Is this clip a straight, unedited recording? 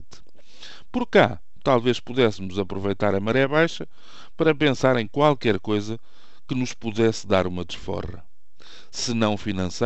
yes; 0 cuts

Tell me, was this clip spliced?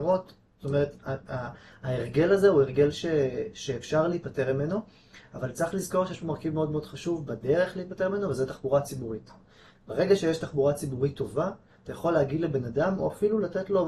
no; 0 cuts

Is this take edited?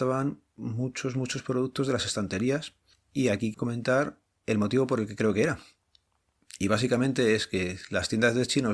yes; 1 cut; at 3.5 s

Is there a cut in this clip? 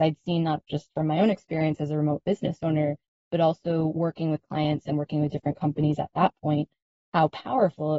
no; 0 cuts

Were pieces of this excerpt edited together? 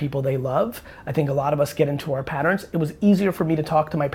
no; 0 cuts

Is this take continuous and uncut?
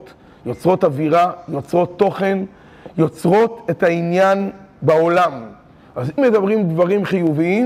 no; 1 cut; at 6.2 s

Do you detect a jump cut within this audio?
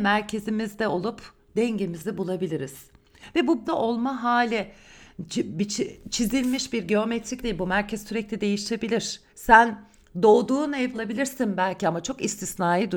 yes; 4 cuts; at 3.6 s, 7.4 s, 9.3 s, 10.9 s

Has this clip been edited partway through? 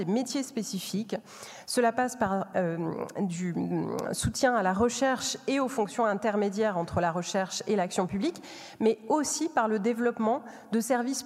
no; 0 cuts

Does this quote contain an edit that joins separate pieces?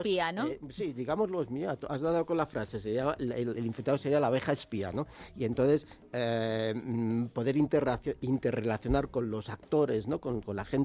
no; 0 cuts

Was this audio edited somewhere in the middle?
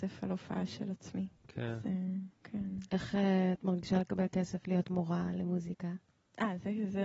yes; 2 cuts; at 1.4 s, 2.3 s

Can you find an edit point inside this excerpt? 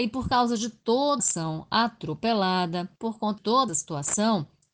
yes; 4 cuts; at 1.2 s, 3.0 s, 3.4 s, 3.7 s

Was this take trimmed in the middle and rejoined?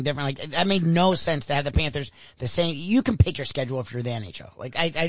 no; 0 cuts

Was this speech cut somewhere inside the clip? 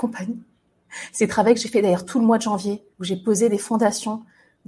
yes; 1 cut; at 2.9 s

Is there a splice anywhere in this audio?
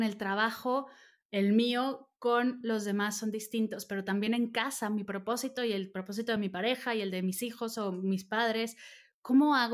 no; 0 cuts

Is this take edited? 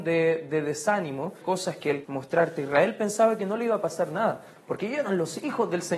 yes; 2 cuts; at 1.4 s, 2.0 s

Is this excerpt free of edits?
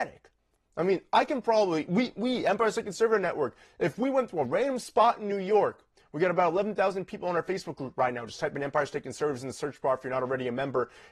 yes; 0 cuts

